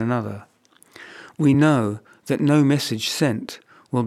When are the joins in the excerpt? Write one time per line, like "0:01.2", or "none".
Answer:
none